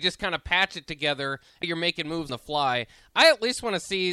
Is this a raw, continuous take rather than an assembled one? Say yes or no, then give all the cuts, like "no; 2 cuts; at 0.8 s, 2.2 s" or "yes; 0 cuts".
no; 2 cuts; at 1.6 s, 2.3 s